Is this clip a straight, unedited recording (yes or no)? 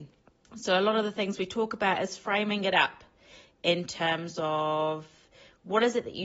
yes